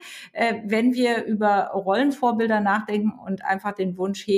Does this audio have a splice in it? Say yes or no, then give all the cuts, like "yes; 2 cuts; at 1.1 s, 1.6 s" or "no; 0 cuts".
no; 0 cuts